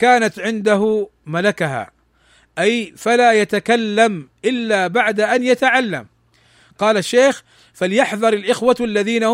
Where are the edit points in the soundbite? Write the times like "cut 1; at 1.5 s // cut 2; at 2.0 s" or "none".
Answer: none